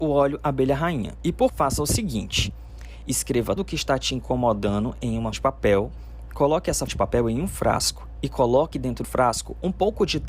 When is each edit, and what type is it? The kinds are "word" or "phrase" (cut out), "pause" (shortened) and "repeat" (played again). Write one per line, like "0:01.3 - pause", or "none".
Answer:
0:01.5 - word
0:03.6 - word
0:05.3 - word
0:06.9 - word
0:09.0 - word